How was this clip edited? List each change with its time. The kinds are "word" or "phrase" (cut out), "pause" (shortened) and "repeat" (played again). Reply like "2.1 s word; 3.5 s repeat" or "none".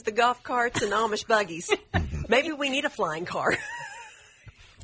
none